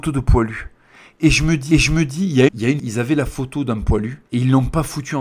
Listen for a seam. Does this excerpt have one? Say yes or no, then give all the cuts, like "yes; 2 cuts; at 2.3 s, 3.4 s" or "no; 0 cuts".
yes; 4 cuts; at 1.7 s, 2.5 s, 2.8 s, 4.3 s